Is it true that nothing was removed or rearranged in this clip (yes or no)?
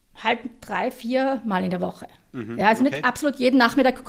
yes